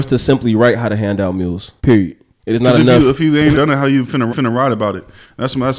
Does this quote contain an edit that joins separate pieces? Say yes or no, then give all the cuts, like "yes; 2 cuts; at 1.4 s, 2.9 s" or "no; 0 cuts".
yes; 3 cuts; at 1.8 s, 3.5 s, 4.3 s